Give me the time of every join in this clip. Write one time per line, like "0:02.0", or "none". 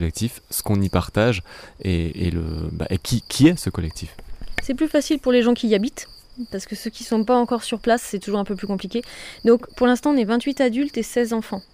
none